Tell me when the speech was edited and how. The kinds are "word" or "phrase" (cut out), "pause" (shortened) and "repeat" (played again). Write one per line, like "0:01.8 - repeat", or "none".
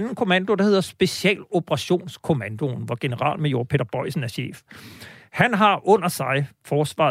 none